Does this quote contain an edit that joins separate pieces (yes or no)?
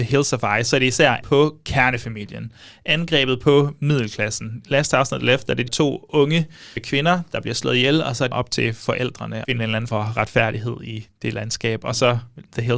yes